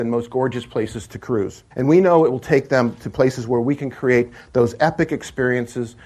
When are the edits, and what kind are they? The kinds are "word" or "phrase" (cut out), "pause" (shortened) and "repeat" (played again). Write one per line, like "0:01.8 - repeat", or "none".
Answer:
0:01.7 - pause